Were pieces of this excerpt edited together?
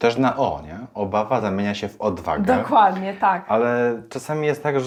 no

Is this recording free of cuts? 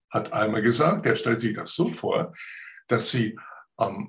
yes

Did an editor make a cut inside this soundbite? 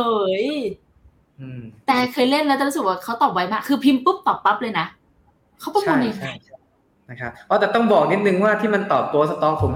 no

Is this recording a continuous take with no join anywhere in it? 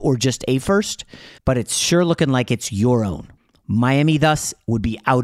no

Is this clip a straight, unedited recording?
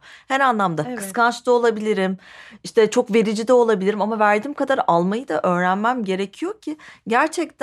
yes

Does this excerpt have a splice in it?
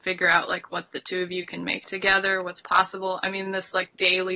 no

